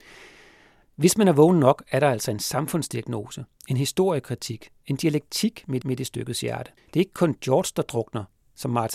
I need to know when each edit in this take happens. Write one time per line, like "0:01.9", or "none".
0:05.8
0:06.8